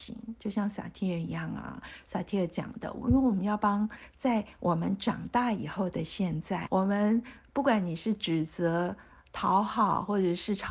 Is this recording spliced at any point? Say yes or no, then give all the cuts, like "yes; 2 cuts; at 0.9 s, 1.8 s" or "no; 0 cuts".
yes; 1 cut; at 6.7 s